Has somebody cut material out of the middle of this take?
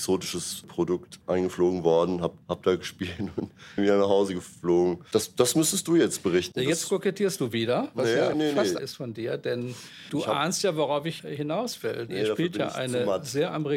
yes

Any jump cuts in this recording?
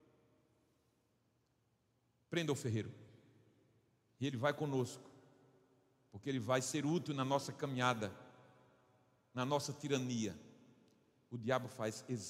no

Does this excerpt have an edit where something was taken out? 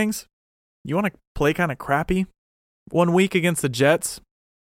no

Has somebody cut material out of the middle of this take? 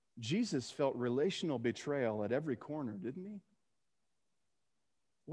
no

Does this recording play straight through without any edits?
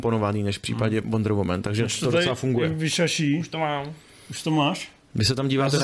yes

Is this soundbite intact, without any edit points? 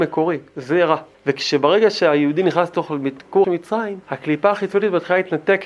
no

